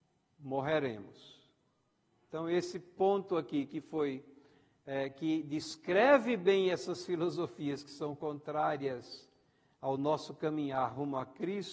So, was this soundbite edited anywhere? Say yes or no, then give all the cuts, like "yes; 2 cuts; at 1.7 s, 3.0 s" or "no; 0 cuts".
no; 0 cuts